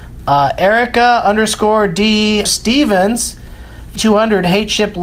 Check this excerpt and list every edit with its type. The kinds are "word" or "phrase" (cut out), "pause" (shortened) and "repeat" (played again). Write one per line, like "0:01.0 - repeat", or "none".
0:02.5 - word
0:04.0 - word